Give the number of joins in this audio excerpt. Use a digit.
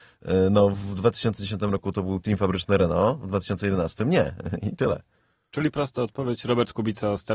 0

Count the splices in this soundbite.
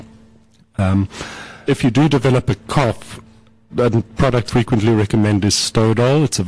3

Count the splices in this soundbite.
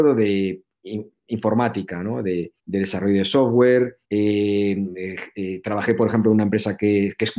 2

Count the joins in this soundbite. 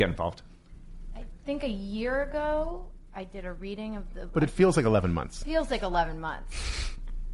0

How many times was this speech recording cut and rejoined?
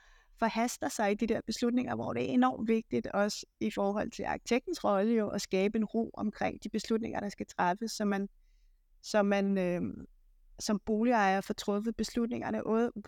0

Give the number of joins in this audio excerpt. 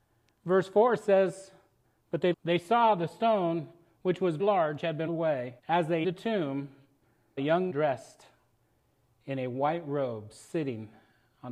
8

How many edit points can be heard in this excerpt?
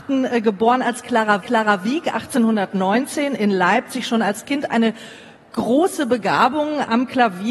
1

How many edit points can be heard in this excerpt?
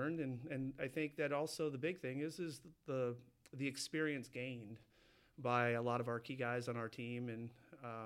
0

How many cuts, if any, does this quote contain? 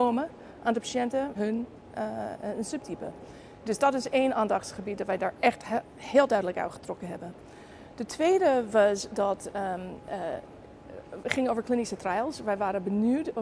1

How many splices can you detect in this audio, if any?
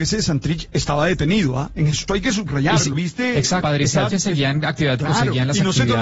5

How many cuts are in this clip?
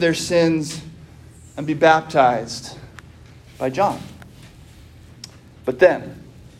0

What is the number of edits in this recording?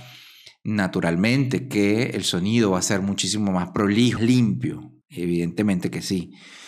2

